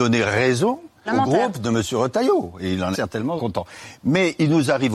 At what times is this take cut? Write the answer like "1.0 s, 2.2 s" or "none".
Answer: 1.1 s, 2.9 s, 3.4 s

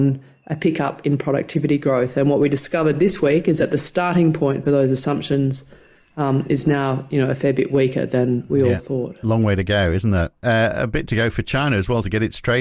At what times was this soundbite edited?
none

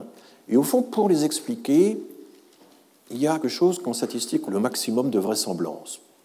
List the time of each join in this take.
3.4 s, 4.5 s

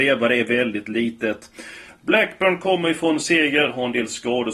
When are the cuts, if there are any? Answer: none

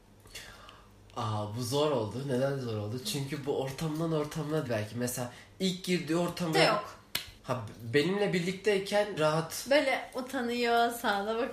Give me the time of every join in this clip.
4.7 s, 6.5 s, 7.4 s, 9.2 s

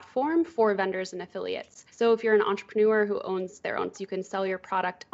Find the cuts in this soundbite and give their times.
1.9 s, 3.9 s

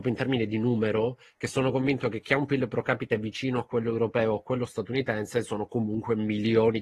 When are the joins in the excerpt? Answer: none

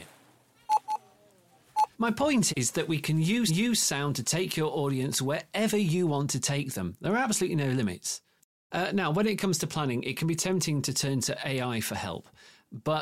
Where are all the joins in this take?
1.9 s, 2.5 s, 3.5 s

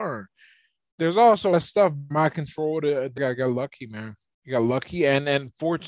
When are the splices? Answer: 1.5 s, 2.1 s, 3.2 s

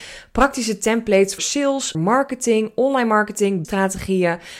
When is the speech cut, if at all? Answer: 1.4 s, 1.9 s, 3.6 s

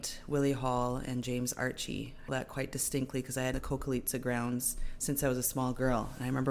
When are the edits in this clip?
2.3 s, 3.5 s

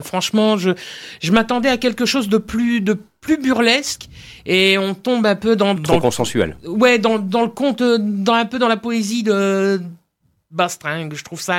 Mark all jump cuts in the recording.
5.8 s

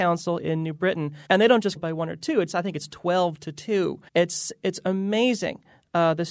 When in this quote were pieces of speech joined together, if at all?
1.3 s, 1.8 s, 4.1 s

